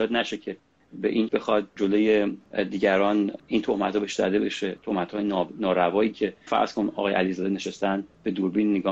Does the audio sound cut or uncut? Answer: cut